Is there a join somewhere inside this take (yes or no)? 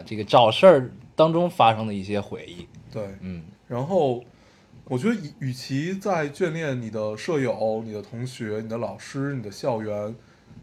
yes